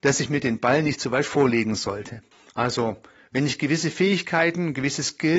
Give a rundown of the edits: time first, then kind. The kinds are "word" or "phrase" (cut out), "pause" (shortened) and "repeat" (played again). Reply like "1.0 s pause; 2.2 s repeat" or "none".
2.3 s pause